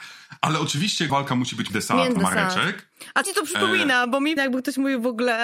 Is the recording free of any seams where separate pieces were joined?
no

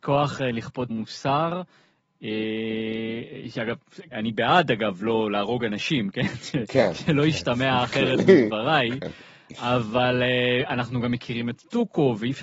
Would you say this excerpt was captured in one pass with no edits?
no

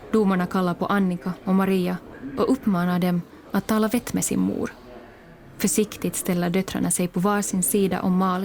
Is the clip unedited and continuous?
yes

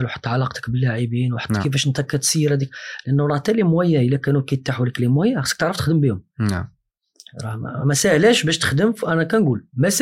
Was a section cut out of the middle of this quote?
no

